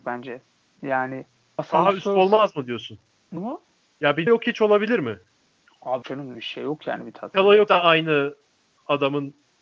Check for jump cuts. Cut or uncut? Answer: cut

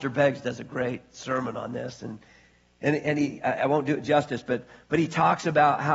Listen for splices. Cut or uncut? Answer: uncut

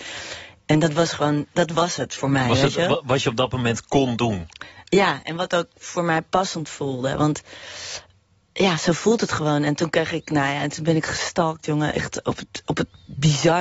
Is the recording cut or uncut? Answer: uncut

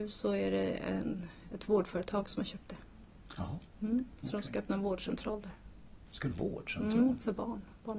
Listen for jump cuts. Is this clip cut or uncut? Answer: cut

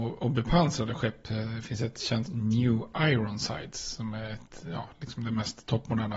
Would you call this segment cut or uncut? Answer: cut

